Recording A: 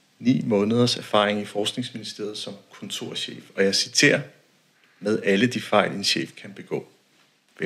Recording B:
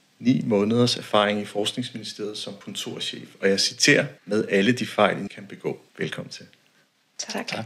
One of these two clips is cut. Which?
B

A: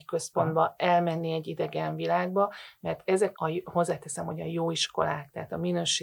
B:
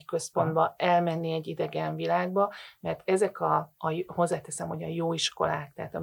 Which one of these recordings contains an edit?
A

